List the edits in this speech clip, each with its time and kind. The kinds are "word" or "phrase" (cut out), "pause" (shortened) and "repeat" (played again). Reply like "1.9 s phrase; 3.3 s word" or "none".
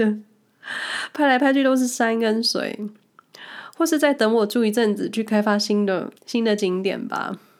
6.2 s pause